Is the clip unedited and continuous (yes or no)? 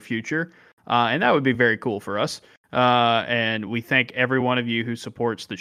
yes